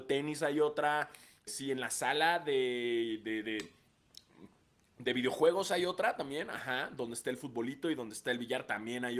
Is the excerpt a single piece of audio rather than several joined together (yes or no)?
no